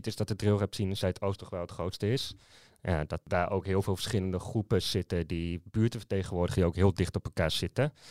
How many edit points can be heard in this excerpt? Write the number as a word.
zero